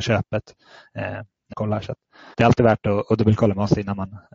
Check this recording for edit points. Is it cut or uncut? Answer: cut